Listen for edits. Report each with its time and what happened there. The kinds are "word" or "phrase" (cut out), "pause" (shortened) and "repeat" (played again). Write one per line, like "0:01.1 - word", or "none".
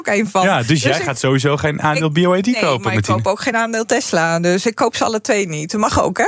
none